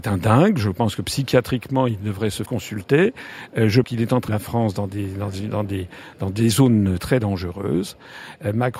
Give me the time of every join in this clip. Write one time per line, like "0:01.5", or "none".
0:02.5
0:03.8
0:04.3
0:07.0